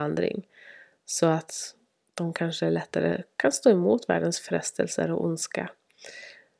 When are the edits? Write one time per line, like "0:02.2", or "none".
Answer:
none